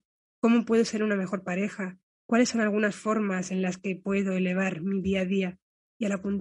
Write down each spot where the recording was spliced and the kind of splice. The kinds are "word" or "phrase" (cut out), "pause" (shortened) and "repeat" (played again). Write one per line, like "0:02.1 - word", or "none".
none